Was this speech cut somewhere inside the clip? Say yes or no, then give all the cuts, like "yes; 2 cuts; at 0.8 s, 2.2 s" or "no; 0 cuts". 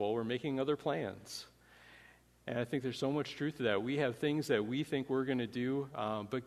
no; 0 cuts